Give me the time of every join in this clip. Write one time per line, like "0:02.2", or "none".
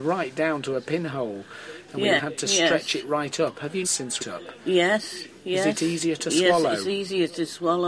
0:02.2
0:03.8
0:04.2